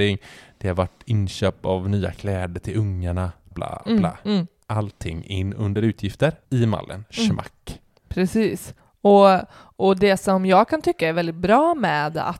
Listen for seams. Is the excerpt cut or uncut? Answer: cut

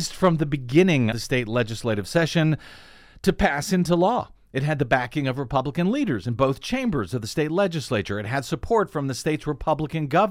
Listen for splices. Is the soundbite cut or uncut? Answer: cut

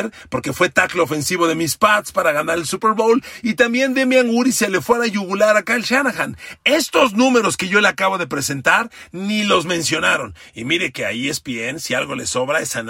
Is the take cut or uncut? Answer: uncut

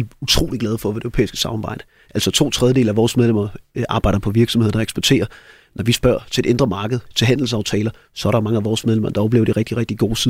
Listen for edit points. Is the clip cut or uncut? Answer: uncut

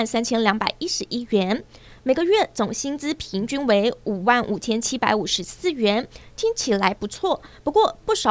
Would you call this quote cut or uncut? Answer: uncut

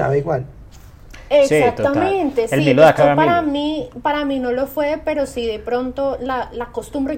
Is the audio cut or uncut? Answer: cut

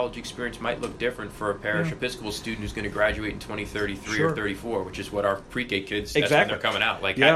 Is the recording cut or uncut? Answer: uncut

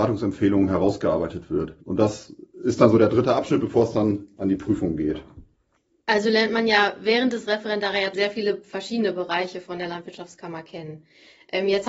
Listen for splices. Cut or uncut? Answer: cut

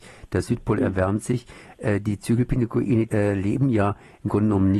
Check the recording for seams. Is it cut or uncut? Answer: cut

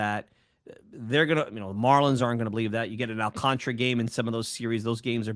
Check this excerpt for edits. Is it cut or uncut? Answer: uncut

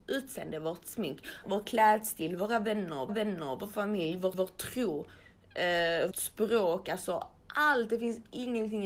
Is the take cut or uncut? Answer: cut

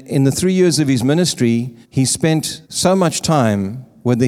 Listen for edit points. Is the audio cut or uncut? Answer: cut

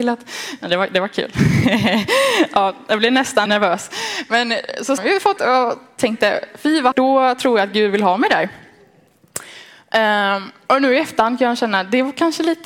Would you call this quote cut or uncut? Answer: cut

